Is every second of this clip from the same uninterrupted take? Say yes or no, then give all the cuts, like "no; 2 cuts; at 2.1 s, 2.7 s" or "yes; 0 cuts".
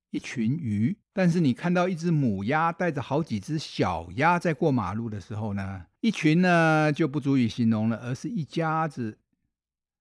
no; 2 cuts; at 1.0 s, 6.0 s